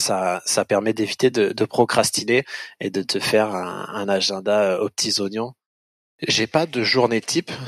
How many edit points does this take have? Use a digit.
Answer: 0